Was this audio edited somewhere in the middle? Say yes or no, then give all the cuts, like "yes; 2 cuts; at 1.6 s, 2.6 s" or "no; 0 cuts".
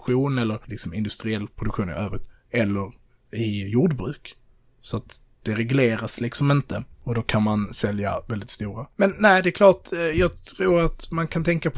no; 0 cuts